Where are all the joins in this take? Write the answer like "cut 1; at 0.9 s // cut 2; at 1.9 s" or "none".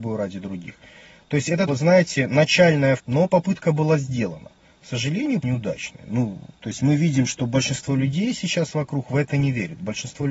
cut 1; at 1.7 s // cut 2; at 3.0 s // cut 3; at 5.4 s // cut 4; at 6.6 s